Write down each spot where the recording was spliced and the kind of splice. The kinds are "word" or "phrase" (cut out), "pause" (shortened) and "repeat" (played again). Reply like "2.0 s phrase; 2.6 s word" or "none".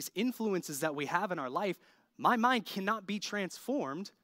none